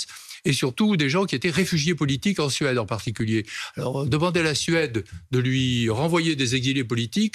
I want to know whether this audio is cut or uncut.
uncut